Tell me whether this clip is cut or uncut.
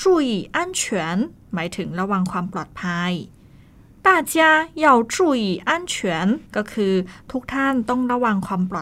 cut